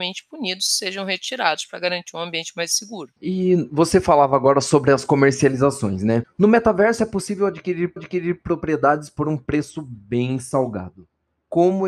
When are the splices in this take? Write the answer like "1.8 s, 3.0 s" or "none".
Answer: 3.2 s, 8.0 s